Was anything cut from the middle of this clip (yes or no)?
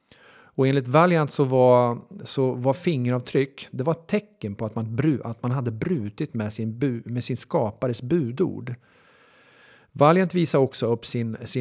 no